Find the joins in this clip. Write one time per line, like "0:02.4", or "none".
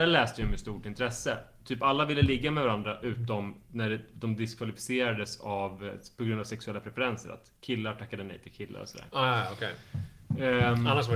none